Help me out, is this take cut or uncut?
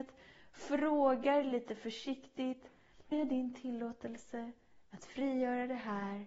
cut